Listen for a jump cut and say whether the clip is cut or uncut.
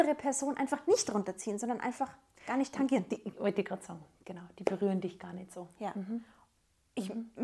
uncut